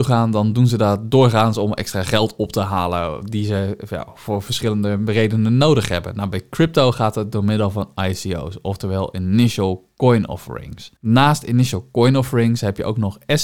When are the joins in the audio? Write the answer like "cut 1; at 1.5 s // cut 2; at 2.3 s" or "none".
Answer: cut 1; at 11.0 s